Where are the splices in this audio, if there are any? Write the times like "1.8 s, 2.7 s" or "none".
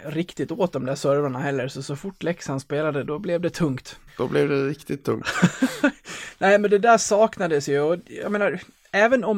3.1 s, 4.1 s